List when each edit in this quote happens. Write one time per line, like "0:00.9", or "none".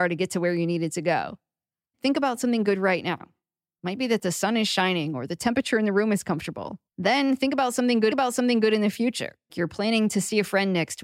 0:01.9
0:06.9
0:08.1
0:09.5